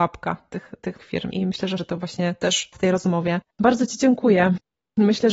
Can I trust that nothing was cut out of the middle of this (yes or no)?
no